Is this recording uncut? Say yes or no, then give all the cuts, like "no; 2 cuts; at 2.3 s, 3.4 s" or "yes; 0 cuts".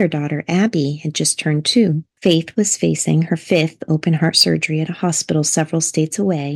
no; 1 cut; at 2.1 s